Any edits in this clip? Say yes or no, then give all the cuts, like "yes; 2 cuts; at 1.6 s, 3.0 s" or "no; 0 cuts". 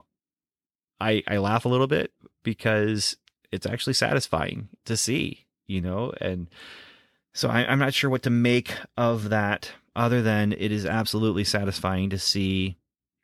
no; 0 cuts